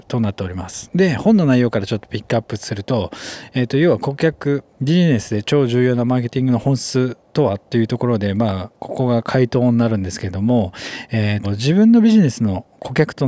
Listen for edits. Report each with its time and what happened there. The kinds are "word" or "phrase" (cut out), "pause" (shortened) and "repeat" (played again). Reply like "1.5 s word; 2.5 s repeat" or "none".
4.7 s pause; 11.4 s word